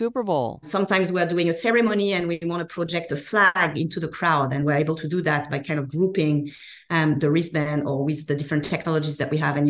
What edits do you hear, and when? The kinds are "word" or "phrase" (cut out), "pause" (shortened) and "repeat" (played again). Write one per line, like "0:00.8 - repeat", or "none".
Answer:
none